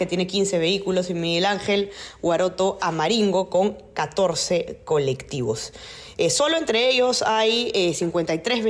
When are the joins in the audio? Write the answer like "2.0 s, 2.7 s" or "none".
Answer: none